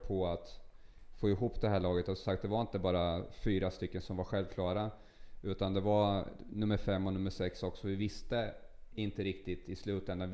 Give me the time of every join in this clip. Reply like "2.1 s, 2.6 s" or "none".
none